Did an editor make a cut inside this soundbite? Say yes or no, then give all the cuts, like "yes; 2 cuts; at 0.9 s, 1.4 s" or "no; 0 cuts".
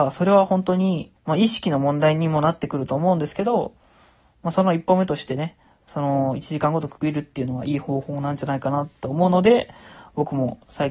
yes; 1 cut; at 1.2 s